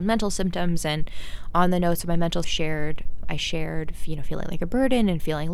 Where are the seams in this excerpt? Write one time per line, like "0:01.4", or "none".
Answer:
0:02.4
0:03.2